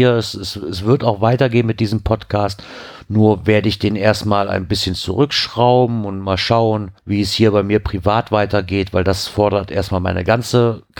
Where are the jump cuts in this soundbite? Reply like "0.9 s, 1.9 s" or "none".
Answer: 7.0 s

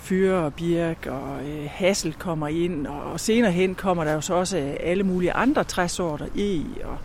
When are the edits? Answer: none

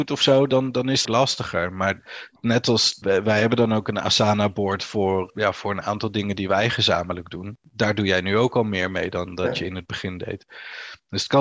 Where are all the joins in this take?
1.0 s, 3.0 s, 5.3 s

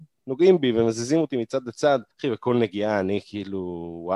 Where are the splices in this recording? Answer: 2.1 s

